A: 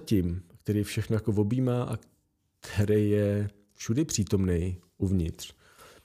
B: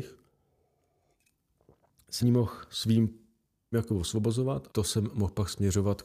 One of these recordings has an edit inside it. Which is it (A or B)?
B